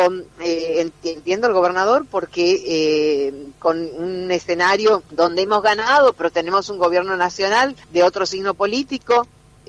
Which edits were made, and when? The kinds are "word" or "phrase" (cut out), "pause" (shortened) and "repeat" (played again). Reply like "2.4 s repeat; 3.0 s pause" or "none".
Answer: 1.0 s pause; 5.1 s pause; 7.8 s pause